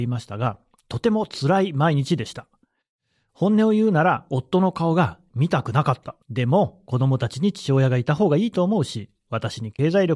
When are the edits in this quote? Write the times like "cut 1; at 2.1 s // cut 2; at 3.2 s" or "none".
cut 1; at 6.2 s